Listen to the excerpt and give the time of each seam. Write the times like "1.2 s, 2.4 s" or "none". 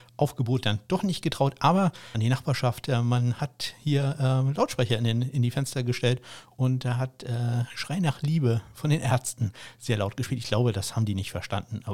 2.1 s